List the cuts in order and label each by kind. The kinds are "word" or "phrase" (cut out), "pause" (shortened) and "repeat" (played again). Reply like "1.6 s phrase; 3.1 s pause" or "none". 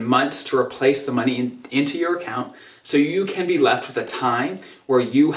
none